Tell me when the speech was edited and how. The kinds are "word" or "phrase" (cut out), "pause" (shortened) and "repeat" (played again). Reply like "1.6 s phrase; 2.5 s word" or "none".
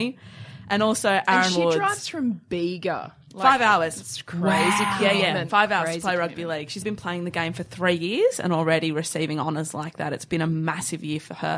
6.8 s word